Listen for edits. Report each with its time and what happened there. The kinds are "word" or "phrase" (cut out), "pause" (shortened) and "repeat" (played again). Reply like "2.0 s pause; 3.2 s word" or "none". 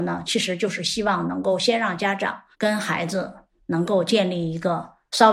2.5 s pause